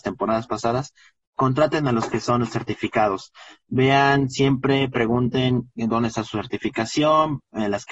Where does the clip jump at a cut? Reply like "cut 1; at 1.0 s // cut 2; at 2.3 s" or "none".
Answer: none